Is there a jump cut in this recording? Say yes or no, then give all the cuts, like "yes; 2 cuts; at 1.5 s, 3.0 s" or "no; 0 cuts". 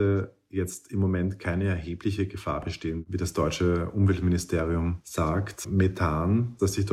no; 0 cuts